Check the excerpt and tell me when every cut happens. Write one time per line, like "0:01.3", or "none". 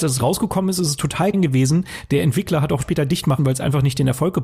0:01.3
0:02.8
0:03.4